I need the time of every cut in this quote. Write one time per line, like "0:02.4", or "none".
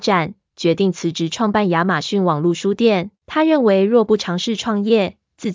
0:03.2